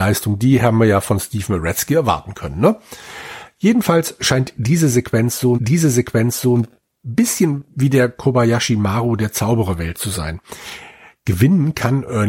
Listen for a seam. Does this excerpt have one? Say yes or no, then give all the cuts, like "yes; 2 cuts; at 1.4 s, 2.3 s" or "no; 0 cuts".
yes; 1 cut; at 5.5 s